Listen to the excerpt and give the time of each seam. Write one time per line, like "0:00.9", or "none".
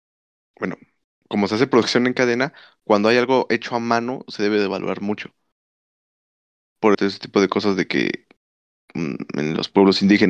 0:06.9